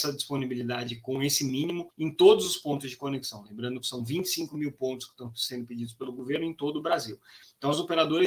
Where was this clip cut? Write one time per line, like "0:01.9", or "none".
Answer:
0:01.9